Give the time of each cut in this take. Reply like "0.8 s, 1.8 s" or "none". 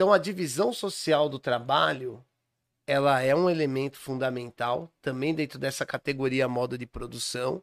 none